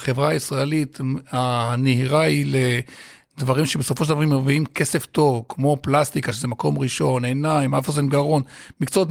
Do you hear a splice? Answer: no; 0 cuts

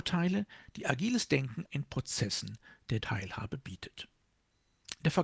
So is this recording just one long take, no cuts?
no; 2 cuts; at 1.7 s, 3.0 s

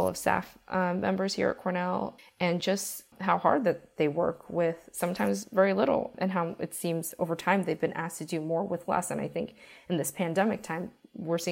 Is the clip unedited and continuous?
yes; 0 cuts

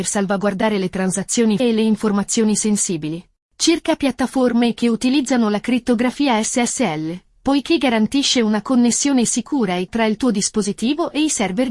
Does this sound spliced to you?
yes; 2 cuts; at 1.6 s, 9.9 s

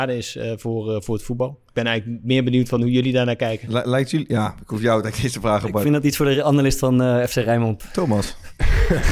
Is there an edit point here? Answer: no; 0 cuts

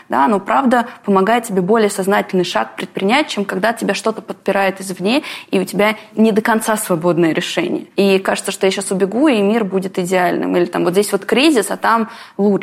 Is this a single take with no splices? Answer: yes; 0 cuts

